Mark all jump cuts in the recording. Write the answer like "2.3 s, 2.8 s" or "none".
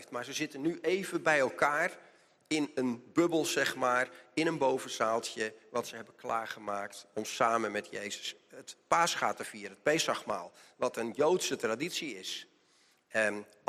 none